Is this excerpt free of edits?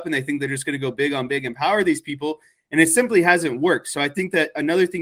yes; 0 cuts

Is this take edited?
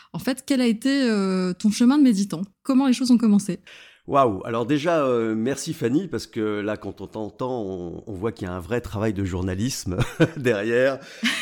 no; 0 cuts

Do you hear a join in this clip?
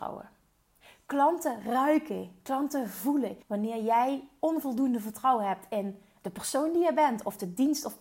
yes; 1 cut; at 3.4 s

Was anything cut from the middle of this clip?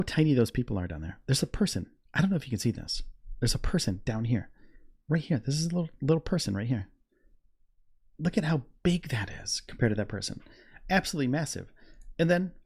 no; 0 cuts

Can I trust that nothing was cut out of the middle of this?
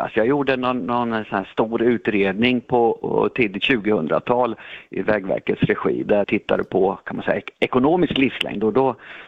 no; 1 cut; at 6.2 s

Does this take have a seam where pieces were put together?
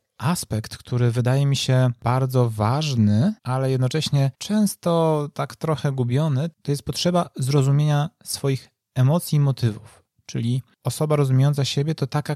yes; 2 cuts; at 3.4 s, 4.3 s

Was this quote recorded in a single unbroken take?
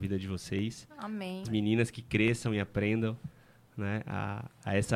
no; 1 cut; at 1.4 s

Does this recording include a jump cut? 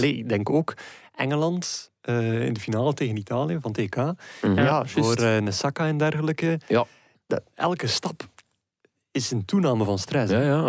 no; 0 cuts

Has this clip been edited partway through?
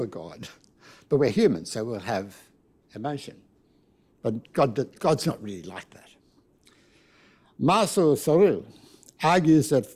no; 0 cuts

